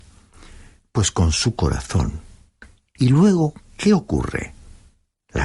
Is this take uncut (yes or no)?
yes